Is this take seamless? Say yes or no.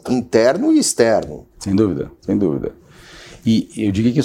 no